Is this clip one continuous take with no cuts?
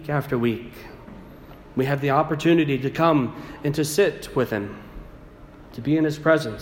yes; 0 cuts

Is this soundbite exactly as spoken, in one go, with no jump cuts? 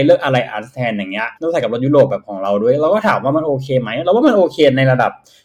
no; 1 cut; at 1.4 s

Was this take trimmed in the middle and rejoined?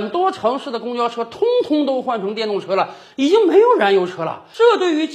no; 0 cuts

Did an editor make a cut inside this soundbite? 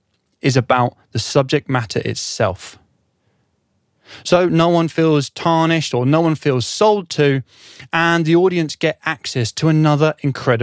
no; 0 cuts

